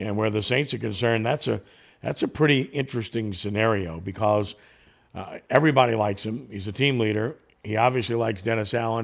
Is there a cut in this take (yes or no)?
no